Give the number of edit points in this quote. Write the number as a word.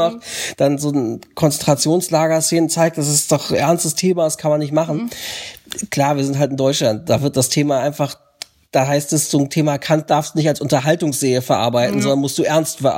zero